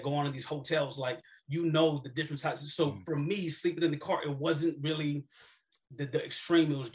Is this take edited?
no; 0 cuts

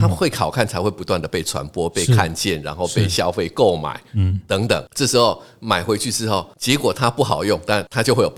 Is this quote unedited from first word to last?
yes; 0 cuts

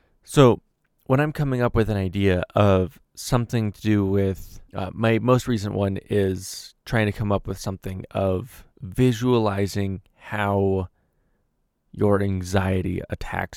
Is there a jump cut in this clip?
yes; 2 cuts; at 4.7 s, 8.7 s

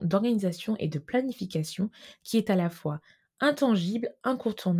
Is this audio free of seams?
yes; 0 cuts

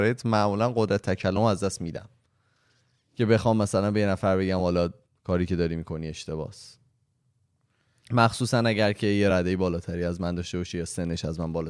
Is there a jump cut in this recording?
no; 0 cuts

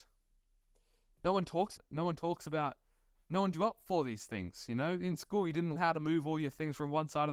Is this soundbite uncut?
no; 3 cuts; at 1.8 s, 3.5 s, 5.8 s

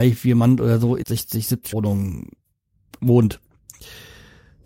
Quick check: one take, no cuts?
no; 2 cuts; at 1.0 s, 1.7 s

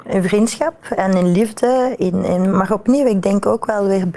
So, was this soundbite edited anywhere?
no; 0 cuts

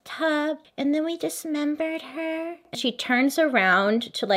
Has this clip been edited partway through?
yes; 1 cut; at 2.7 s

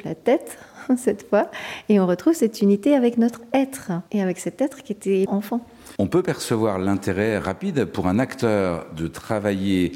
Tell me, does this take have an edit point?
yes; 3 cuts; at 4.1 s, 5.3 s, 6.0 s

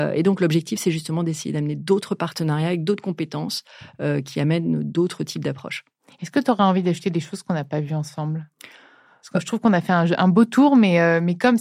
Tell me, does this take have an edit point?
no; 0 cuts

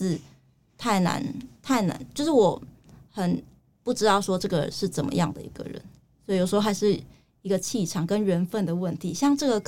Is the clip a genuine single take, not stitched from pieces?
yes; 0 cuts

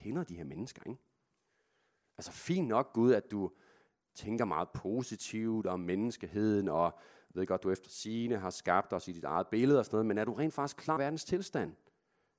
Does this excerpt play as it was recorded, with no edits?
no; 1 cut; at 11.0 s

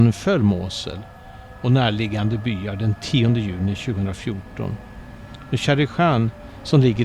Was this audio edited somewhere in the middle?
no; 0 cuts

